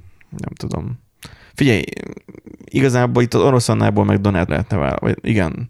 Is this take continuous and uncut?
no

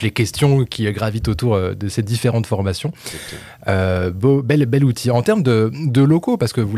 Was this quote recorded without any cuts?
yes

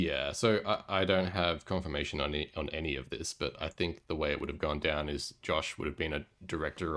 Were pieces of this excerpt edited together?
no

